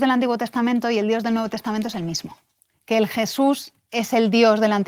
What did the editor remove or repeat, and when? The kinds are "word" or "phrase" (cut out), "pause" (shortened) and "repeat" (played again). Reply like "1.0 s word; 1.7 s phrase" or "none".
none